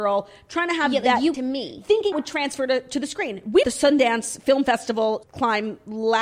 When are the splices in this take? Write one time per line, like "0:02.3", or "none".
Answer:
0:01.3
0:02.1
0:03.6
0:05.2